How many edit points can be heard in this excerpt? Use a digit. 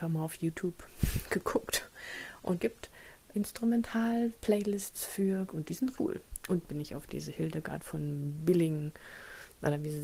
5